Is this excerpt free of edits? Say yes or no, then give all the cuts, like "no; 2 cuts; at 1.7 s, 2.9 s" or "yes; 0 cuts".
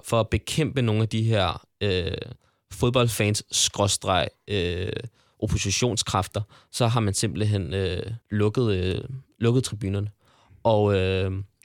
no; 1 cut; at 8.2 s